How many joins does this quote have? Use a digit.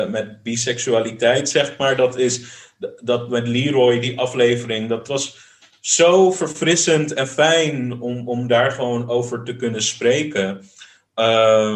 0